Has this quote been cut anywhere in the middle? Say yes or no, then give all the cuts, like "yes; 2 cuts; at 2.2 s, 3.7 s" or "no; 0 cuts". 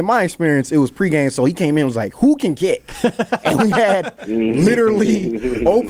no; 0 cuts